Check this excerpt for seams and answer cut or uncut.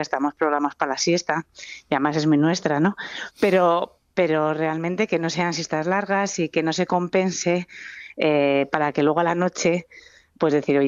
uncut